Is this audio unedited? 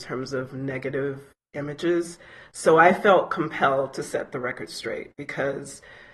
yes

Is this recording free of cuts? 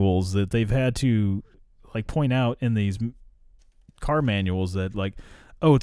yes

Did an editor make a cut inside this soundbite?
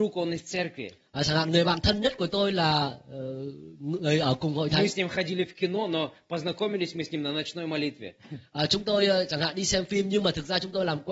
no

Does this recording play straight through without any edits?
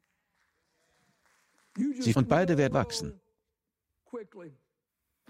no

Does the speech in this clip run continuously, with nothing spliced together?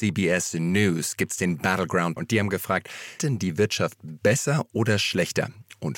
no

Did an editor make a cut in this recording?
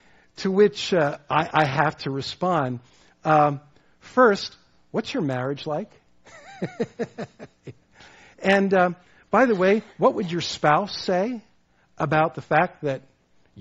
no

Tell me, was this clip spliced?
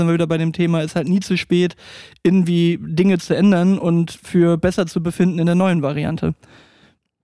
no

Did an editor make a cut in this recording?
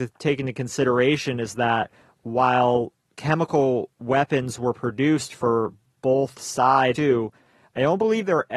yes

